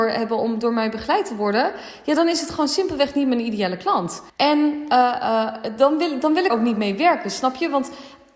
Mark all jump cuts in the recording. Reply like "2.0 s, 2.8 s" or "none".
4.3 s, 6.5 s